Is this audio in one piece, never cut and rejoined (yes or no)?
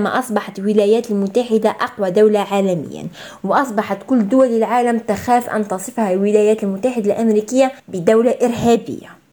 no